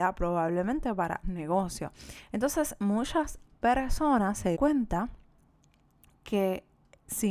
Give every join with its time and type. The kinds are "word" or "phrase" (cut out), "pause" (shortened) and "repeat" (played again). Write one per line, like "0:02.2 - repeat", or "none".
0:01.2 - word
0:04.5 - word